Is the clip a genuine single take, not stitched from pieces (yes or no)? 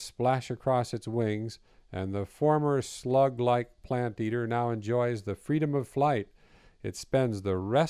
yes